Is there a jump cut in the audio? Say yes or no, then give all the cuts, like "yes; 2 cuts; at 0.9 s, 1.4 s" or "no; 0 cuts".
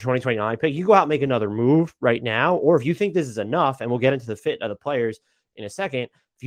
no; 0 cuts